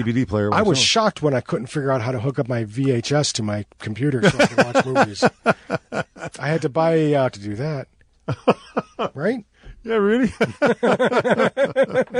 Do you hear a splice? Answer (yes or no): yes